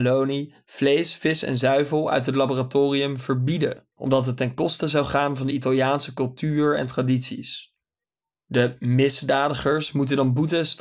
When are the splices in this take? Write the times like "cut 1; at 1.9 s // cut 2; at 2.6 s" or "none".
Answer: cut 1; at 3.9 s // cut 2; at 8.0 s